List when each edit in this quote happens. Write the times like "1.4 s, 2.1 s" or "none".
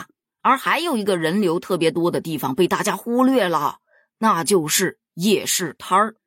none